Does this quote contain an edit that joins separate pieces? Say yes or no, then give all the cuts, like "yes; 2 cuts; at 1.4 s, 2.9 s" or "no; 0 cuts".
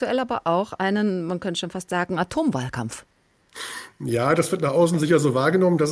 no; 0 cuts